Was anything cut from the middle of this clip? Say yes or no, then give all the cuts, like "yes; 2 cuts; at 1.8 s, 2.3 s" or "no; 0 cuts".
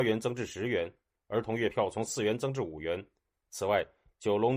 no; 0 cuts